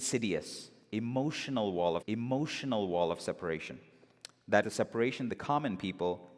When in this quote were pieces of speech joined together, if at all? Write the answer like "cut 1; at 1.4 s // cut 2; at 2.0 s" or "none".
cut 1; at 2.0 s // cut 2; at 4.6 s // cut 3; at 5.3 s